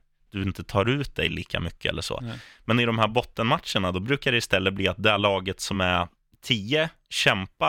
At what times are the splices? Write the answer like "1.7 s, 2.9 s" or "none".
none